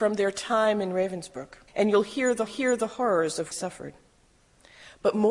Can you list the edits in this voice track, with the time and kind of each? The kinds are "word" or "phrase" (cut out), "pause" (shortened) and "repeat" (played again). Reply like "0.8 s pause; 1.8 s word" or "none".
1.7 s pause; 2.5 s repeat; 3.5 s phrase

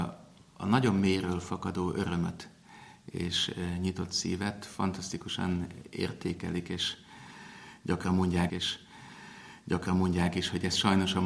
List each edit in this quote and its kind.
8.5 s repeat

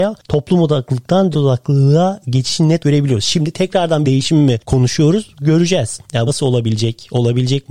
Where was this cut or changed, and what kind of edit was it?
1.3 s word; 2.8 s word; 4.0 s word; 4.6 s word; 6.3 s word

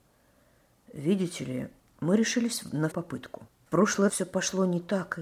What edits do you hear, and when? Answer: 1.8 s pause; 2.9 s word; 3.6 s pause; 4.1 s word

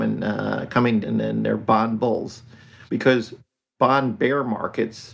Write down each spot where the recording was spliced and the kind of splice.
1.0 s word; 2.9 s pause

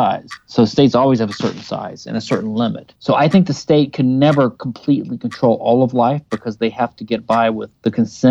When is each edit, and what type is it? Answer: none

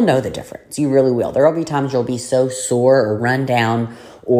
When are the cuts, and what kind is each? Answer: none

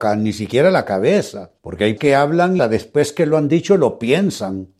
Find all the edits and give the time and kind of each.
1.6 s pause; 2.0 s word; 2.6 s phrase

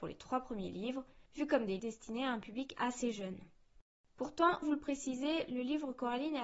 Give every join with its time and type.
1.3 s pause; 1.8 s word; 4.6 s word

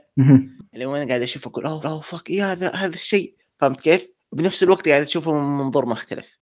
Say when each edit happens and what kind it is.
1.8 s repeat

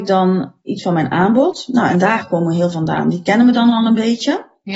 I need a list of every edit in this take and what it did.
2.7 s phrase

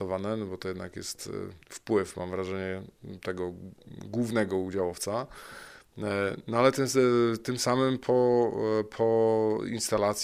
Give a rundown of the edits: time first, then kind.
1.6 s pause

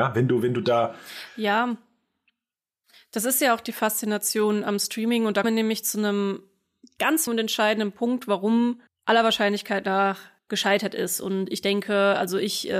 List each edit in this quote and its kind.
5.4 s word; 7.3 s word; 8.9 s word

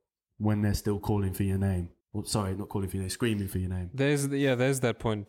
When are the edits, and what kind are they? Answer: 2.0 s pause

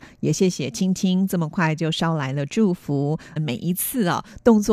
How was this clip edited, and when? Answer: 3.4 s phrase

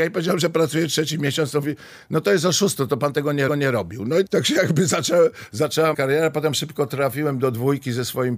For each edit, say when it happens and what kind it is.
3.5 s repeat; 4.3 s word; 5.9 s word

